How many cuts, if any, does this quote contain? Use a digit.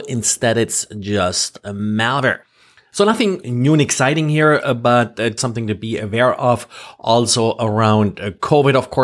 2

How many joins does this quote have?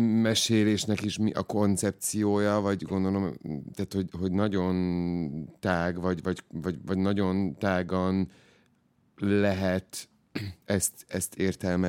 0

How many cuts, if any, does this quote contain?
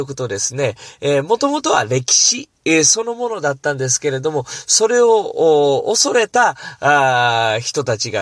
0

